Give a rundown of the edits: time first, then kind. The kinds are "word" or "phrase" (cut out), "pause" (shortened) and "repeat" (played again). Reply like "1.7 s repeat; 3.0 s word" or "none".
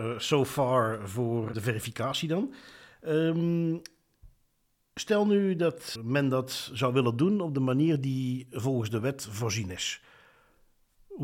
1.5 s word; 6.0 s word